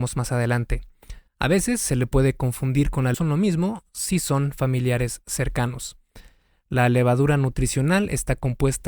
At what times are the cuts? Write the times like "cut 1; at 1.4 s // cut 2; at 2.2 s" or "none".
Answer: cut 1; at 1.3 s // cut 2; at 3.1 s